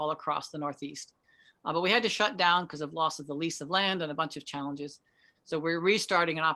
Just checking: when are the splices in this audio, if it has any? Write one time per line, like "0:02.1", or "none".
none

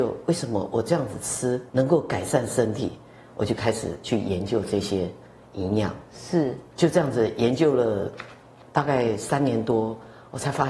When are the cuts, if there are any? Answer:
0:01.7

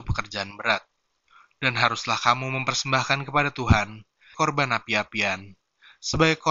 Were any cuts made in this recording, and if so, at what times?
0:04.3

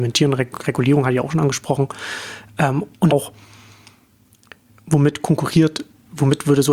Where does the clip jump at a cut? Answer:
0:03.1

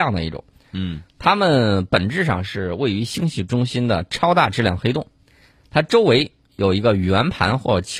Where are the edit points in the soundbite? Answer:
none

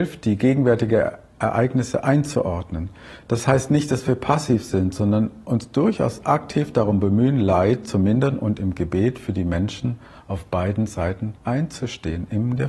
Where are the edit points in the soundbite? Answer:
0:11.4

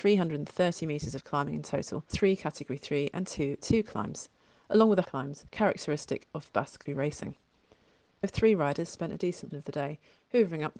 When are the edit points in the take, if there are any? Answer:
0:02.1
0:03.6
0:05.0
0:05.5
0:06.9
0:08.2
0:09.5

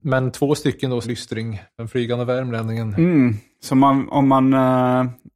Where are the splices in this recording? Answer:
0:01.0

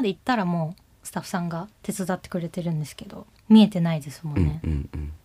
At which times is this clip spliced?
0:01.7
0:03.4

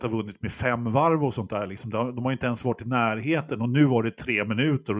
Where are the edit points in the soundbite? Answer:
none

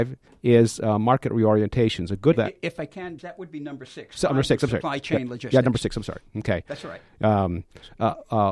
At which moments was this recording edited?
0:02.3
0:03.2

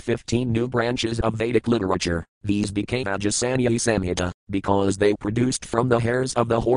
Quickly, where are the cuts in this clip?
0:02.3
0:03.0
0:05.1

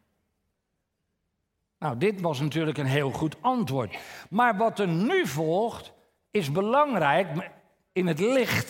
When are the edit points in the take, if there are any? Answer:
none

